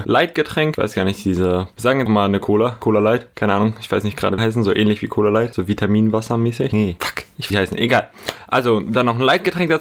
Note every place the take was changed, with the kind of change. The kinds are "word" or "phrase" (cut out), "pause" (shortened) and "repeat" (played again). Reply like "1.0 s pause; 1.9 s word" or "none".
2.1 s word; 4.4 s phrase; 7.5 s phrase